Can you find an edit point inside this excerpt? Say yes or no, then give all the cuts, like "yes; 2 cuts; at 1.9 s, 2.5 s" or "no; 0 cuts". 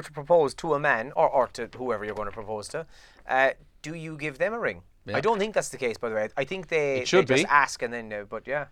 no; 0 cuts